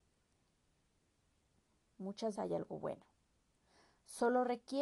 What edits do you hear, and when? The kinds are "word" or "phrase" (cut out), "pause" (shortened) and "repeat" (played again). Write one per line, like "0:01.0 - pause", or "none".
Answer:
0:02.4 - word